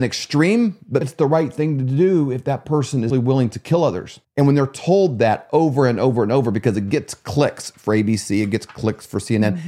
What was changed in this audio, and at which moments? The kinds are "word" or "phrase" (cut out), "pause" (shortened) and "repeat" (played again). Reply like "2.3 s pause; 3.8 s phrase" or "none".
1.0 s word; 3.1 s word; 4.2 s pause